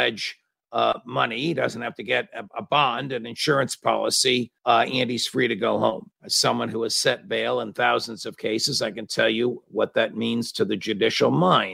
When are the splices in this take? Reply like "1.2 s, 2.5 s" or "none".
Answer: 4.6 s, 6.1 s